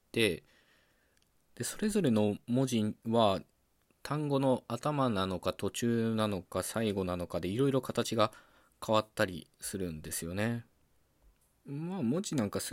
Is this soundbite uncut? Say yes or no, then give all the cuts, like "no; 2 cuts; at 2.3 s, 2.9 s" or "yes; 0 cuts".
yes; 0 cuts